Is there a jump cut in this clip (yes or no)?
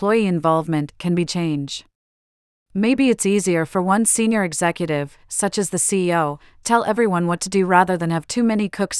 yes